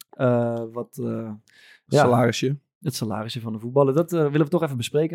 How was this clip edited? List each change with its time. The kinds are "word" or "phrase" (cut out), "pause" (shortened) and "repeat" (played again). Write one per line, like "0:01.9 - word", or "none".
none